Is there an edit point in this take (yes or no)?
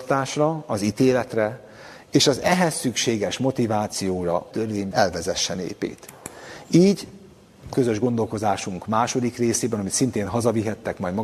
yes